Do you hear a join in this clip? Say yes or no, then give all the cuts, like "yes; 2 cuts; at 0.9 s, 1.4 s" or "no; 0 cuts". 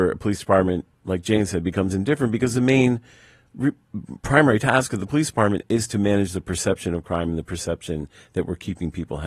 no; 0 cuts